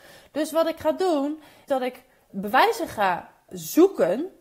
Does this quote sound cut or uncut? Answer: cut